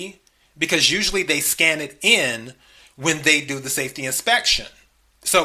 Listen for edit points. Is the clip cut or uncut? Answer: uncut